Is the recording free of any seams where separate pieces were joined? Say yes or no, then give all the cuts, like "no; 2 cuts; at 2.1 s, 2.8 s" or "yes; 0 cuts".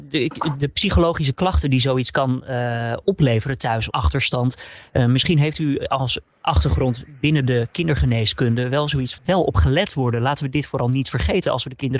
no; 2 cuts; at 3.9 s, 9.2 s